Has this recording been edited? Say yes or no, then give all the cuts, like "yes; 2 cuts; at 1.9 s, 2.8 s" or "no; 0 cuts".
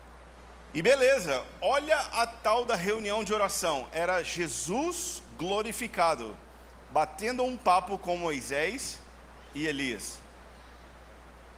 no; 0 cuts